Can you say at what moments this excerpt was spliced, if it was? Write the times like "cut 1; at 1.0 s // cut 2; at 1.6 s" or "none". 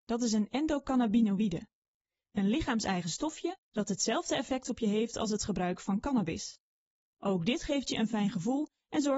cut 1; at 3.6 s